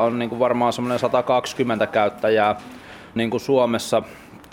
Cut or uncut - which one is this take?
cut